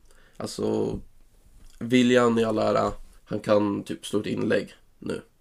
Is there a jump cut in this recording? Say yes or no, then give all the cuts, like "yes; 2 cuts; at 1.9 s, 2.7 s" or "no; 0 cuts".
yes; 1 cut; at 3.2 s